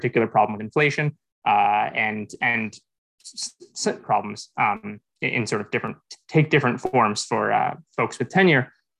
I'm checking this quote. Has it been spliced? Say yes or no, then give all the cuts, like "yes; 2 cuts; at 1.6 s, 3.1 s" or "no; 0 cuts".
yes; 1 cut; at 4.0 s